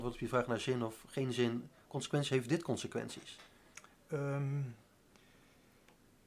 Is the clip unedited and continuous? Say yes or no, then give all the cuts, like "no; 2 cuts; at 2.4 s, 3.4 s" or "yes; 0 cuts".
yes; 0 cuts